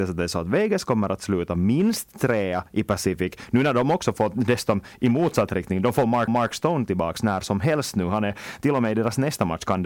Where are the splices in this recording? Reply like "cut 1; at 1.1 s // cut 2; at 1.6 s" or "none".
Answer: cut 1; at 6.3 s